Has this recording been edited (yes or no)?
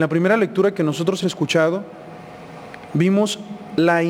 yes